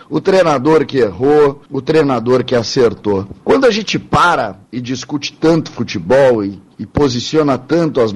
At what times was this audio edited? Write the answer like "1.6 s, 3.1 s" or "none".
1.7 s, 3.4 s, 4.7 s